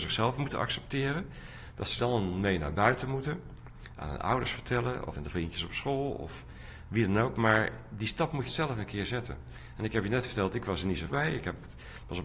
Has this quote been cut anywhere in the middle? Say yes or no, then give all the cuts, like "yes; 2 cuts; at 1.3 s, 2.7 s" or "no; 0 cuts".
yes; 4 cuts; at 2.0 s, 5.1 s, 8.5 s, 11.1 s